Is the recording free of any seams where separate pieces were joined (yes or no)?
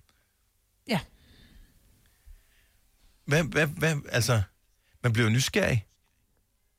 yes